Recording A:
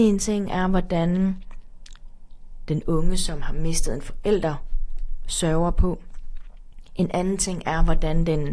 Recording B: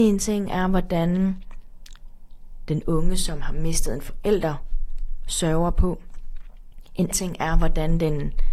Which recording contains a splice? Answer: B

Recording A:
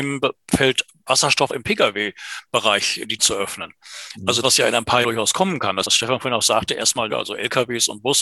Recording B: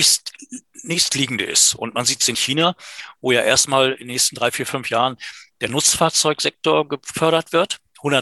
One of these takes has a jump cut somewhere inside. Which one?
A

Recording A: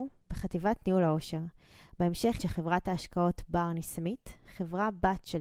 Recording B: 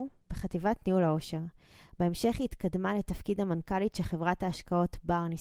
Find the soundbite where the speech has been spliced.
A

